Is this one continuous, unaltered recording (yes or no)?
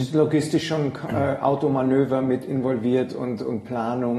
yes